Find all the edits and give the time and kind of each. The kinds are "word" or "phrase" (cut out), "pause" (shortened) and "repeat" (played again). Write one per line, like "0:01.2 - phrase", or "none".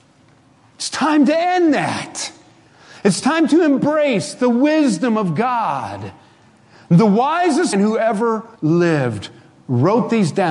0:07.7 - word
0:08.6 - pause